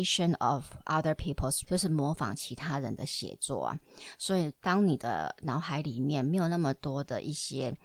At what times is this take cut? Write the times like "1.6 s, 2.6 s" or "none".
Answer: 1.6 s